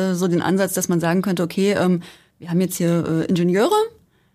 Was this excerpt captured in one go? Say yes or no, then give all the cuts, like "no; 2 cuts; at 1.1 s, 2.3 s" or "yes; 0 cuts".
yes; 0 cuts